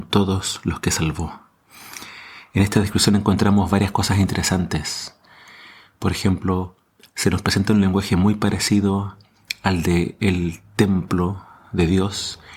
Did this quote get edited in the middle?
no; 0 cuts

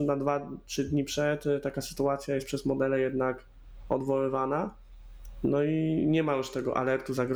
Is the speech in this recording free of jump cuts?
yes; 0 cuts

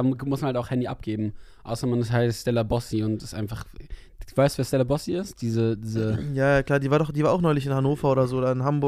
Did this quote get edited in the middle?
no; 0 cuts

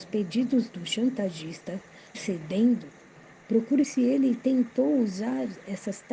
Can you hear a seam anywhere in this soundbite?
yes; 2 cuts; at 2.1 s, 3.8 s

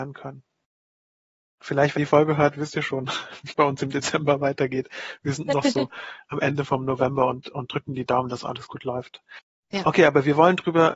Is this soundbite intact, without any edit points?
no; 2 cuts; at 2.0 s, 3.5 s

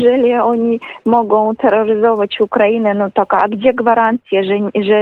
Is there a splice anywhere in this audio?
no; 0 cuts

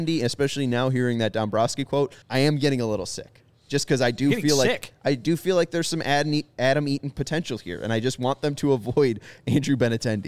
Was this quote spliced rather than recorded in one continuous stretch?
yes; 1 cut; at 2.2 s

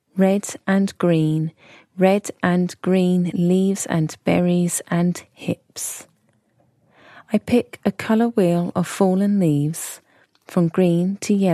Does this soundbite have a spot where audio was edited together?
no; 0 cuts

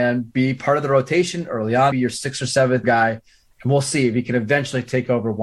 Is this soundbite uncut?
no; 2 cuts; at 1.9 s, 2.8 s

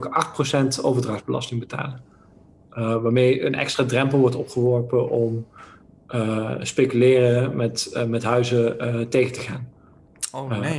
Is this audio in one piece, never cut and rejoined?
yes; 0 cuts

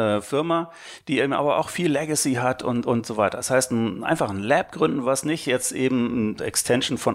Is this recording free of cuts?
yes; 0 cuts

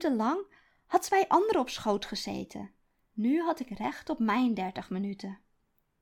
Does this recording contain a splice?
yes; 1 cut; at 2.8 s

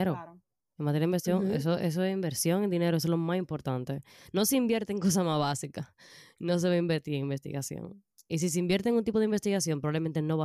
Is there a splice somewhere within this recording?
no; 0 cuts

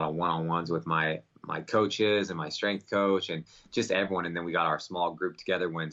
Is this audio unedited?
yes; 0 cuts

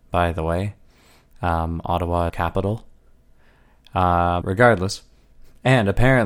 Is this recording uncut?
no; 2 cuts; at 2.3 s, 4.4 s

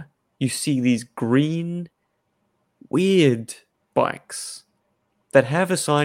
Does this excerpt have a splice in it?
no; 0 cuts

